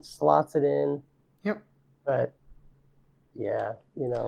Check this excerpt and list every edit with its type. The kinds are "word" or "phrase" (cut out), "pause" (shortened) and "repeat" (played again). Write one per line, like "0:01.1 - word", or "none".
none